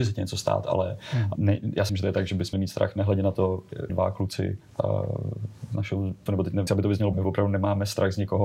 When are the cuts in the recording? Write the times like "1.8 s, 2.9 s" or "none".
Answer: 1.3 s, 1.9 s, 2.5 s, 3.9 s, 6.3 s, 6.7 s, 7.1 s